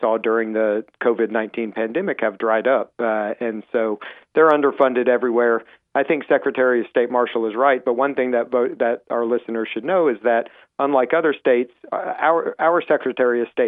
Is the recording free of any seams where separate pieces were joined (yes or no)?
yes